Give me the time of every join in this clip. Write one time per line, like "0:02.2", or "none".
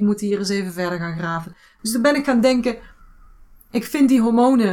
none